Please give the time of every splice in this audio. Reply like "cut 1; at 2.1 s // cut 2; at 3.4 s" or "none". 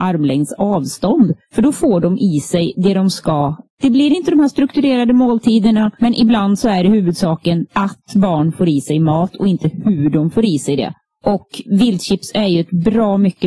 none